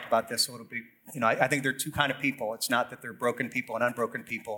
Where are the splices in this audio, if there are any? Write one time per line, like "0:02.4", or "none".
none